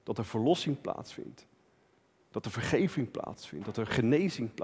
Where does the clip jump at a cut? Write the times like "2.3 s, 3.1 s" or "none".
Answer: none